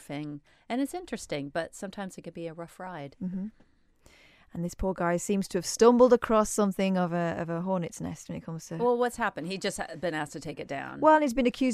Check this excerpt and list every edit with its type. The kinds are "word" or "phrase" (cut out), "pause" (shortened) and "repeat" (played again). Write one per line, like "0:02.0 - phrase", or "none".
none